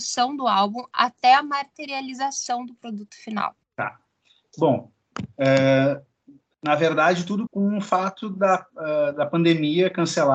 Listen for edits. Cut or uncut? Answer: cut